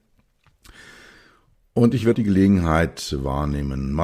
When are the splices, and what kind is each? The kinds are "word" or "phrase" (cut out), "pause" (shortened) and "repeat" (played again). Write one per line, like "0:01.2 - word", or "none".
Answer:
0:02.1 - word